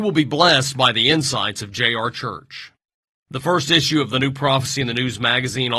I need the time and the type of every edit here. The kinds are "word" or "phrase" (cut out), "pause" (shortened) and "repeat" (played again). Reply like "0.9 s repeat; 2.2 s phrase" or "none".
none